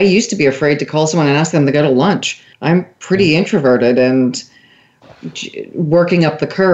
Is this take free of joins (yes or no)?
no